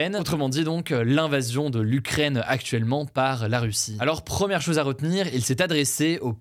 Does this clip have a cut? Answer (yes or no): no